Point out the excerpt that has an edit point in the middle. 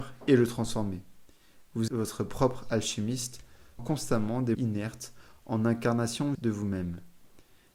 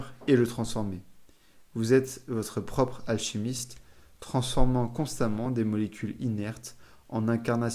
first; 4 cuts; at 1.9 s, 3.8 s, 4.5 s, 6.3 s

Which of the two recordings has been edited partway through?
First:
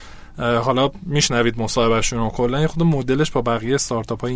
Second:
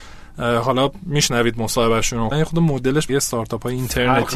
second; 2 cuts; at 2.3 s, 3.1 s

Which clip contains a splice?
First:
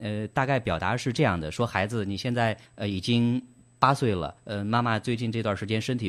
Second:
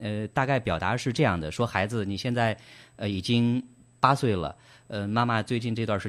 first; 2 cuts; at 2.6 s, 4.4 s

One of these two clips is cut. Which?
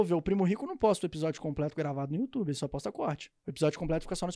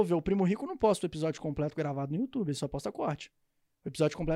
first; 1 cut; at 3.4 s

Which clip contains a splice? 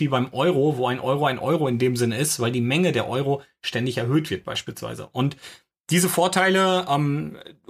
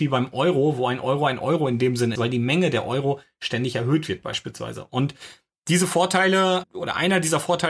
second; 2 cuts; at 2.2 s, 6.6 s

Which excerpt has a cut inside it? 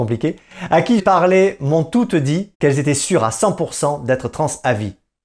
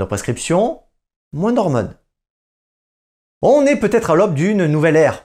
first; 2 cuts; at 1.0 s, 2.5 s

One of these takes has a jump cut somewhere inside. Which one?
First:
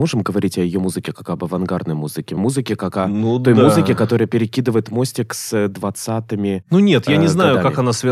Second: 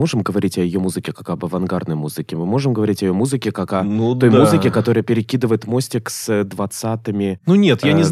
first; 1 cut; at 2.4 s

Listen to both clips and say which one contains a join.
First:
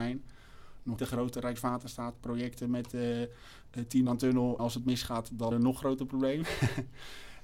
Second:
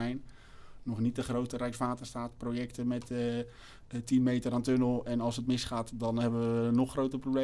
first; 4 cuts; at 1.0 s, 4.1 s, 4.6 s, 5.5 s

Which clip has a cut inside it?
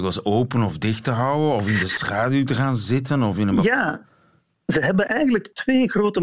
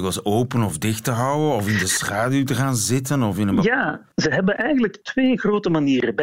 second; 1 cut; at 4.1 s

